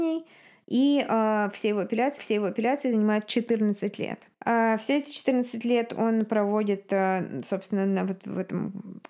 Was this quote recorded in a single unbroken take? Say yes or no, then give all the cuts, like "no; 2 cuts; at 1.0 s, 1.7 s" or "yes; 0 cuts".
no; 1 cut; at 2.2 s